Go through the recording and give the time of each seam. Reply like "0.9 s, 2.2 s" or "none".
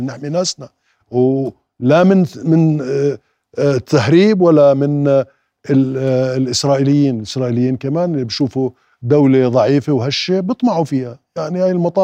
none